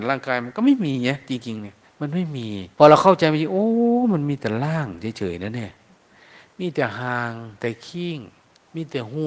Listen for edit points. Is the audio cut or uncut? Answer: cut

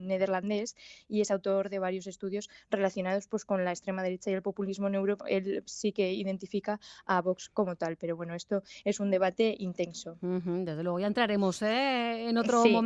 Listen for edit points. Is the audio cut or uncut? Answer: cut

